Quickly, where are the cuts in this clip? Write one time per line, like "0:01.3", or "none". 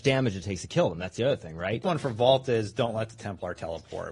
0:01.8